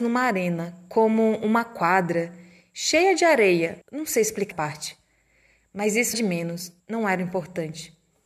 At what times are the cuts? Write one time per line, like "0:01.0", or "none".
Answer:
0:03.8
0:04.5
0:06.1
0:06.8

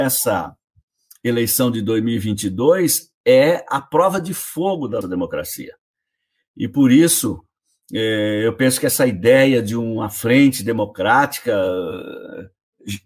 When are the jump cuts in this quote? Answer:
0:05.0

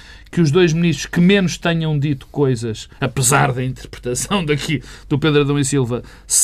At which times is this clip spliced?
none

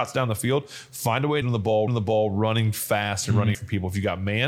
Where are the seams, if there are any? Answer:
0:01.4
0:01.9
0:03.5

